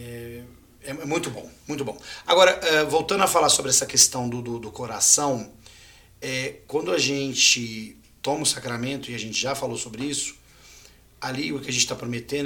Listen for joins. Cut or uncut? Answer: uncut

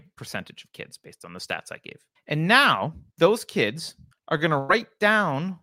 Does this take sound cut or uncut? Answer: cut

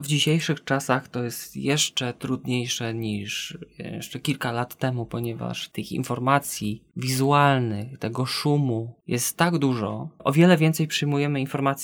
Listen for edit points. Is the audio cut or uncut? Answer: uncut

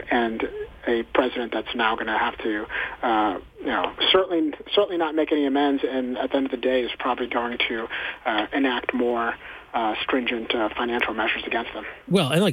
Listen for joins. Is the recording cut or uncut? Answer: cut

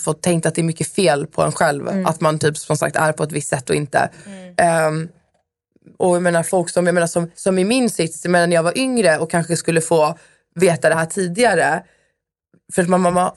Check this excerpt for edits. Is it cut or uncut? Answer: uncut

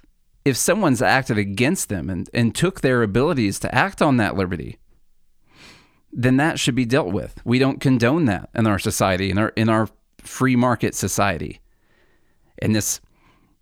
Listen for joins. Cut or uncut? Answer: uncut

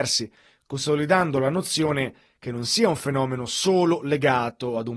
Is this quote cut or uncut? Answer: uncut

